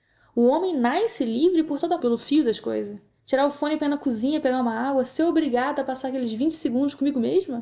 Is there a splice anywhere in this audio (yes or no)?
yes